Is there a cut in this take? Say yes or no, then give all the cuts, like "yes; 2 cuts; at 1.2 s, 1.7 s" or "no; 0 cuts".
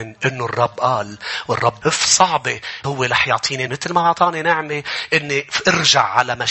yes; 3 cuts; at 1.8 s, 2.8 s, 3.7 s